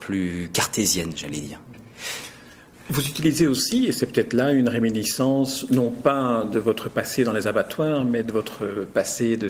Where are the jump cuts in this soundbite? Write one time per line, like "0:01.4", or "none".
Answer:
none